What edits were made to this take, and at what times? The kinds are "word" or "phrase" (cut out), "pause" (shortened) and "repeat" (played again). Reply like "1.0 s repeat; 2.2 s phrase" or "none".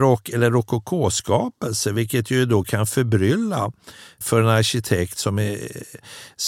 none